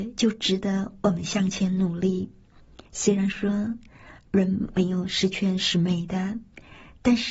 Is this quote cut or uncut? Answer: cut